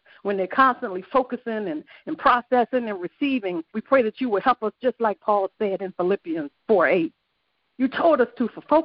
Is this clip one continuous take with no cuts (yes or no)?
no